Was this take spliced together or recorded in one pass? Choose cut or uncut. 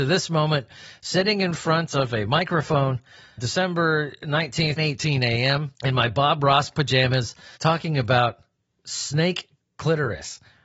cut